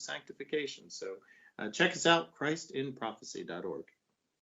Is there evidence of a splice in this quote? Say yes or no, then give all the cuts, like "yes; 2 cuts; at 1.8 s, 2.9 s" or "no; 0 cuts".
no; 0 cuts